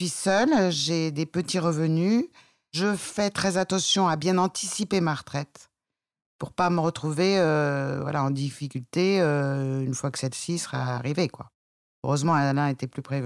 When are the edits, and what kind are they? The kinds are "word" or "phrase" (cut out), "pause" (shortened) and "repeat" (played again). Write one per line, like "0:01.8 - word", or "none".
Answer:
none